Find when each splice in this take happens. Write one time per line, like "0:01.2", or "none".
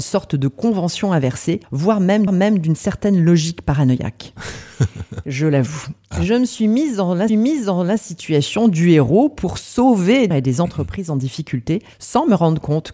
0:01.6
0:02.3
0:07.3
0:10.3
0:11.9